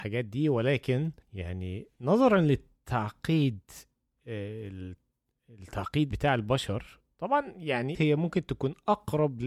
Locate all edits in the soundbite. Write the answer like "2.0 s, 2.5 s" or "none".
1.2 s, 6.1 s, 7.9 s

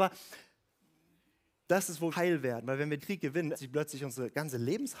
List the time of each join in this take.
2.1 s, 3.0 s, 3.5 s

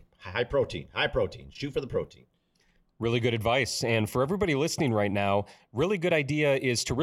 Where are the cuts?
none

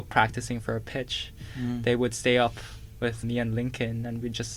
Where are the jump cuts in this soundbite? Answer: 3.2 s

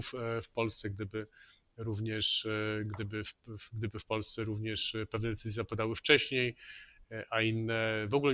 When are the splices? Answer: none

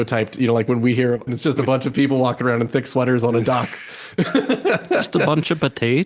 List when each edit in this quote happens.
1.3 s

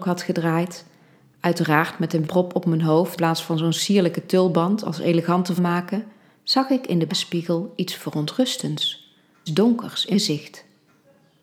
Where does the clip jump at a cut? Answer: 2.2 s, 3.2 s, 5.6 s, 7.1 s, 9.5 s, 10.1 s

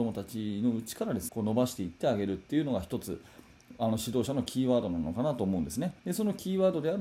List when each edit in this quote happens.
1.3 s, 6.0 s

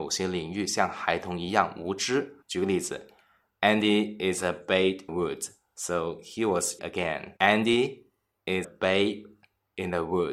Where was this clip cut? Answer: 2.4 s, 5.1 s, 6.8 s, 7.4 s, 8.6 s

